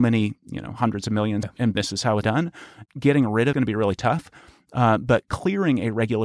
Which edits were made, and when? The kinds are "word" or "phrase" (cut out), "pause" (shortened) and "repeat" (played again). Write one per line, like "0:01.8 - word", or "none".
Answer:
0:01.4 - word
0:01.7 - phrase
0:02.2 - phrase
0:02.9 - word
0:03.5 - phrase